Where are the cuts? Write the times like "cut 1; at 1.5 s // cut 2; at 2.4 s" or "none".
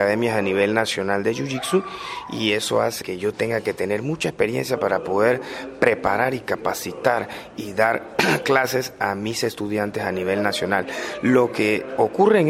cut 1; at 3.0 s